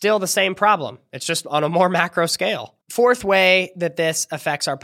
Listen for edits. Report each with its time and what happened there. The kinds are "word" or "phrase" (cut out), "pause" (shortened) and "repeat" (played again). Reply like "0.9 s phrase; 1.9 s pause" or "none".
2.8 s pause